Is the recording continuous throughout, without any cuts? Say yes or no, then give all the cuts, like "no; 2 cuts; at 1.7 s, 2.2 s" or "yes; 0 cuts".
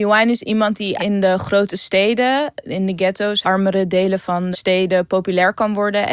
no; 3 cuts; at 1.0 s, 3.4 s, 4.5 s